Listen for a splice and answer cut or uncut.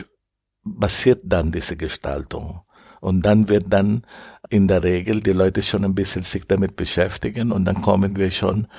uncut